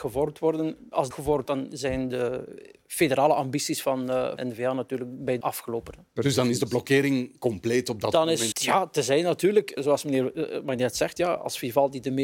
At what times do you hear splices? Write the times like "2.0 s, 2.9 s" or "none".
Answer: 1.1 s, 1.5 s, 4.4 s, 5.4 s, 8.5 s, 9.8 s